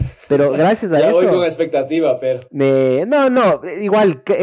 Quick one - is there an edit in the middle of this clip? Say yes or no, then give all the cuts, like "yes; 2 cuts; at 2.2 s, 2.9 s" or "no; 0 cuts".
yes; 1 cut; at 2.5 s